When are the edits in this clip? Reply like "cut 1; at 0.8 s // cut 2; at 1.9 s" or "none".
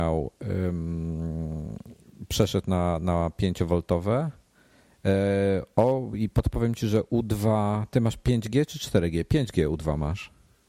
none